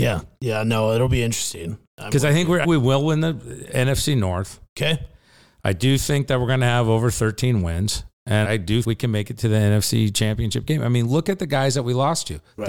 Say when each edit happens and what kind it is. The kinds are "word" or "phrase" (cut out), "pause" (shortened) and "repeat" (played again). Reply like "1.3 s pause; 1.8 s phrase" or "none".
2.6 s word; 8.4 s word; 8.8 s word